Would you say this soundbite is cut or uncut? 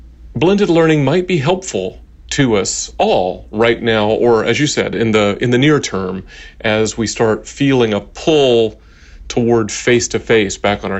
uncut